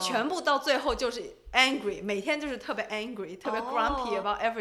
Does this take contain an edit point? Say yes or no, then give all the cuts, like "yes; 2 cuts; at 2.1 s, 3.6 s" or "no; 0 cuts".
no; 0 cuts